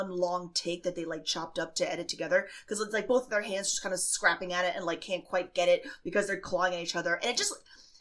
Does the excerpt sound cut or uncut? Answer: uncut